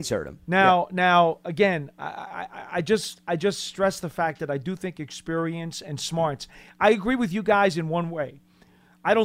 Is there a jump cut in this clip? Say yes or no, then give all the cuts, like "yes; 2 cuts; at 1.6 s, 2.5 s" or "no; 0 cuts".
no; 0 cuts